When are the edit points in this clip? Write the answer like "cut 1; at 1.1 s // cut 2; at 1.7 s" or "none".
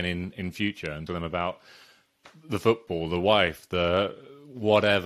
cut 1; at 1.1 s